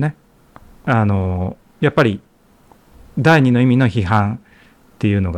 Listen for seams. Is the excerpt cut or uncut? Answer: uncut